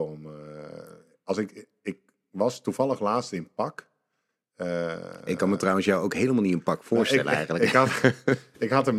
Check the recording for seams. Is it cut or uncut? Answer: uncut